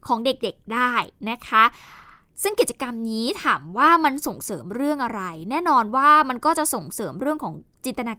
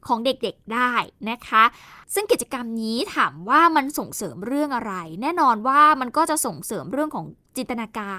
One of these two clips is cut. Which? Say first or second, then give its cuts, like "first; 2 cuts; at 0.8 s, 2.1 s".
second; 1 cut; at 2.0 s